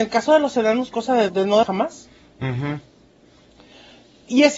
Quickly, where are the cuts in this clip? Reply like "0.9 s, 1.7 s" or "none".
0.9 s, 1.3 s, 1.6 s